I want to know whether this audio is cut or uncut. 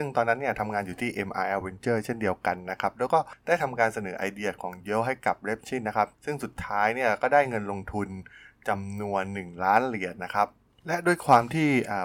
uncut